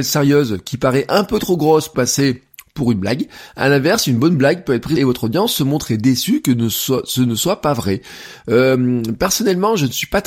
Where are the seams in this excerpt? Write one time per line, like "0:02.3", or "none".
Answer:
0:01.9
0:05.0